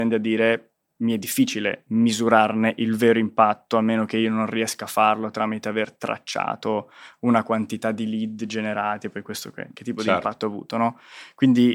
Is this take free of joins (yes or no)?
yes